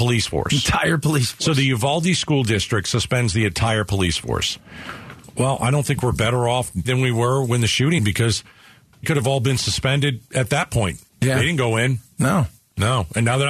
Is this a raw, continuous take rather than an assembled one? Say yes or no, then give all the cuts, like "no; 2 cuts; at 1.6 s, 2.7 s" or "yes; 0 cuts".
no; 5 cuts; at 6.8 s, 8.0 s, 9.0 s, 11.1 s, 12.0 s